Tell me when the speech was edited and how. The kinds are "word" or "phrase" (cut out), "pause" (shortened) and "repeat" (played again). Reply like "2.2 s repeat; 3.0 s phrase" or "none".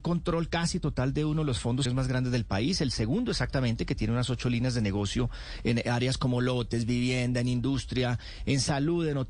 1.9 s word